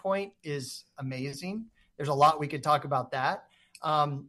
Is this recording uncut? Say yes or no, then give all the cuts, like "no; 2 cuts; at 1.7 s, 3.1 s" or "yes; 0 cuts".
yes; 0 cuts